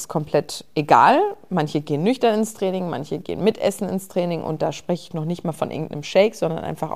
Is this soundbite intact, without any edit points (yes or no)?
yes